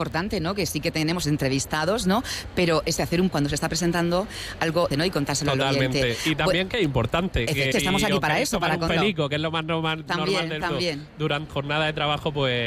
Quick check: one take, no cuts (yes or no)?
no